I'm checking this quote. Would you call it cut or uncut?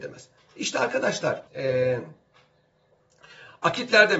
cut